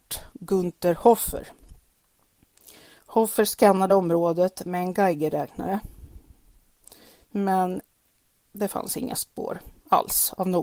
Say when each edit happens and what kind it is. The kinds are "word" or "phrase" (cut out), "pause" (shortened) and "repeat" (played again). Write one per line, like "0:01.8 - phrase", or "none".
none